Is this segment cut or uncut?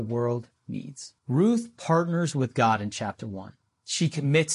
cut